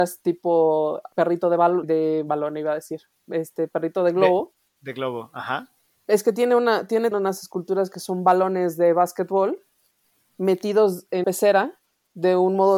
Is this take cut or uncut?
cut